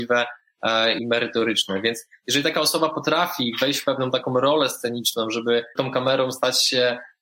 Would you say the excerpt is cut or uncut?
cut